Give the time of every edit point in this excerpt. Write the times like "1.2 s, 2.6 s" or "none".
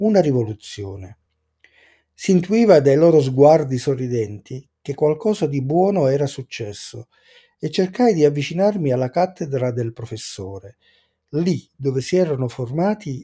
none